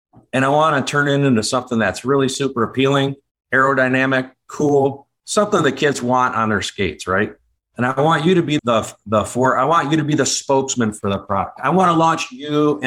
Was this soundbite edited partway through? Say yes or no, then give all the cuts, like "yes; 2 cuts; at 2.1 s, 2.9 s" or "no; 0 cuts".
yes; 1 cut; at 8.6 s